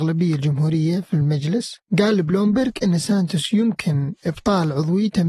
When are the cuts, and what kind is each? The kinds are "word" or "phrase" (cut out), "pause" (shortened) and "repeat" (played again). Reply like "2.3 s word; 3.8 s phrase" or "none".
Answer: none